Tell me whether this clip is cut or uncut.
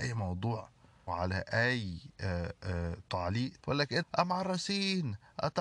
cut